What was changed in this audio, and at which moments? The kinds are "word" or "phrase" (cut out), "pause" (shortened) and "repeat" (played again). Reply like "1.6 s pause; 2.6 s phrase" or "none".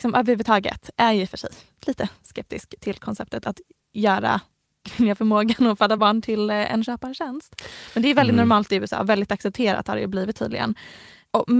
none